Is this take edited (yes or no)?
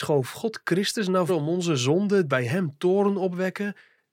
yes